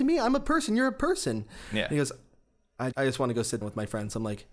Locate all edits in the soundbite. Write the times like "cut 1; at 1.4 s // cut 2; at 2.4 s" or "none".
cut 1; at 2.9 s // cut 2; at 3.6 s